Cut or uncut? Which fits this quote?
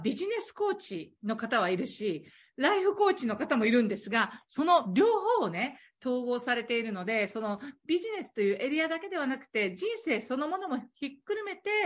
uncut